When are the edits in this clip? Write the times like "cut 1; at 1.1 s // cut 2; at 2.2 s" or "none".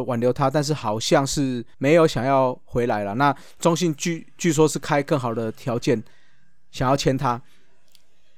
cut 1; at 1.7 s